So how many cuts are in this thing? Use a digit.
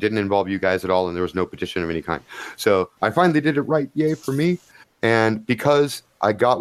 2